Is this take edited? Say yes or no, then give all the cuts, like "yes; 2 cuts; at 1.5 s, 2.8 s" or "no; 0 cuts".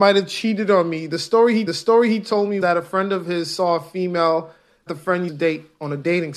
yes; 4 cuts; at 1.7 s, 2.6 s, 4.9 s, 5.3 s